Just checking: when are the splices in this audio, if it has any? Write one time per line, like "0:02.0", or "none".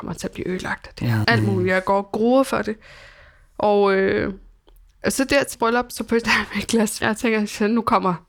0:01.2
0:05.5
0:06.2
0:07.0